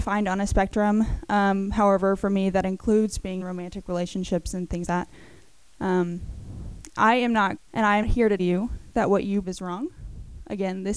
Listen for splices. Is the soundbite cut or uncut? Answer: cut